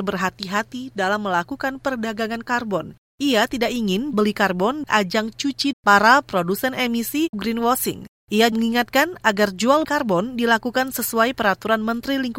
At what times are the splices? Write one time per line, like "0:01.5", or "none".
0:04.1
0:04.9
0:05.7
0:07.3
0:08.5
0:09.8